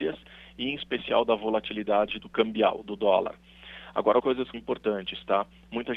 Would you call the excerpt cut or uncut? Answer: cut